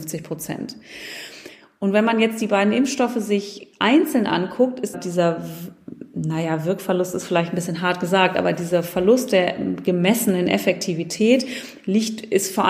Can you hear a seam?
yes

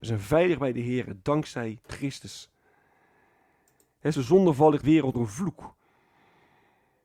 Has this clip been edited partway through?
yes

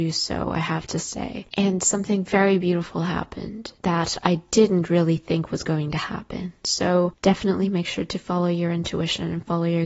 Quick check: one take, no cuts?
yes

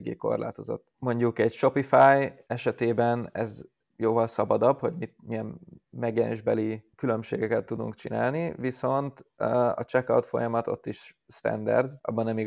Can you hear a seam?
no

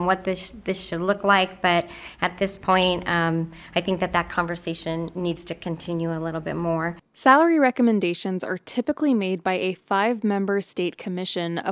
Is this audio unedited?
yes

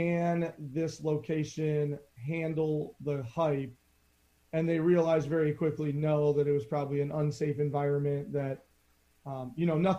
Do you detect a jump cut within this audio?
no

